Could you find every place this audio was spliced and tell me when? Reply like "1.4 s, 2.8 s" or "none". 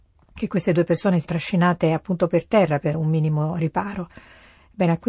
1.2 s, 2.9 s